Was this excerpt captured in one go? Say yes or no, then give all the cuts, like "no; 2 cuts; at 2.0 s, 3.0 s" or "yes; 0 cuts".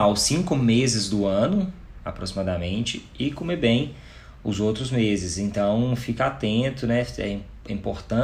yes; 0 cuts